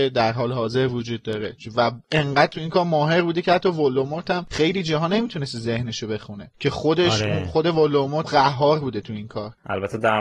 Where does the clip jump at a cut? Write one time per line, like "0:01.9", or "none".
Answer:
0:08.2

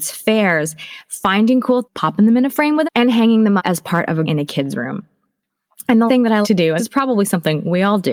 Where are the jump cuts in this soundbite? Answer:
0:01.8
0:02.8
0:03.6
0:04.3
0:06.1
0:06.4
0:06.8

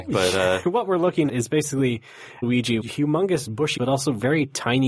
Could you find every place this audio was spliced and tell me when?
0:01.3
0:02.4
0:02.8
0:03.8

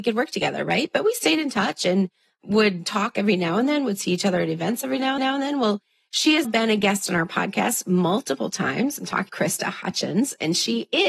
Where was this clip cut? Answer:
0:05.2
0:06.4
0:09.3

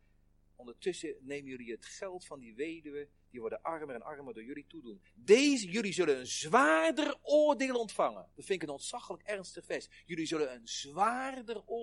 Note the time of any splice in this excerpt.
0:08.3

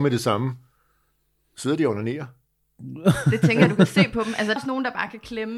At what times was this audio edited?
0:04.6

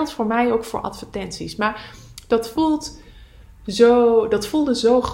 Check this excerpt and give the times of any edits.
none

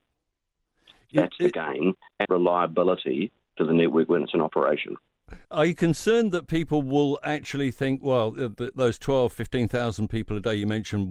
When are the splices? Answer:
0:02.2
0:05.4

